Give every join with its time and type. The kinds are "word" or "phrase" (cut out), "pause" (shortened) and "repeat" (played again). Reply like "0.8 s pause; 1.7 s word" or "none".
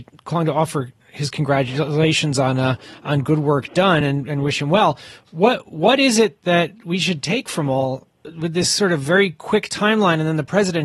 none